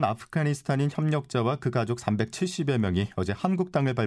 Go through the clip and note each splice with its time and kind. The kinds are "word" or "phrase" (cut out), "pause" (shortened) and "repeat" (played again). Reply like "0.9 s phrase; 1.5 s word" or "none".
none